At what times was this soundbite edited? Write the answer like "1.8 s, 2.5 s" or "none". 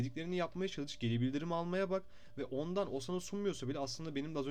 none